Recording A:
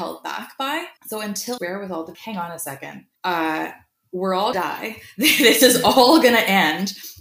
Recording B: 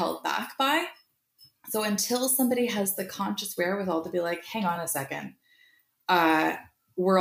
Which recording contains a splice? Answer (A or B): A